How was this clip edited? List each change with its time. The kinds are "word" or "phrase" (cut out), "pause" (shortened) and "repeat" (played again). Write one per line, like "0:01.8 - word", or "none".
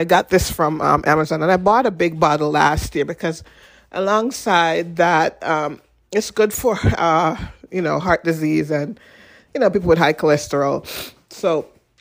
none